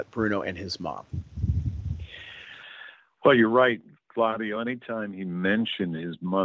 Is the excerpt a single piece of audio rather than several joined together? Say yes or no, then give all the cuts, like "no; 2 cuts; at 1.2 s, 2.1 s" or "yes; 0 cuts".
yes; 0 cuts